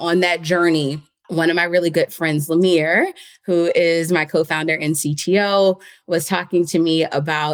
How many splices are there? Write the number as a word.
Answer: zero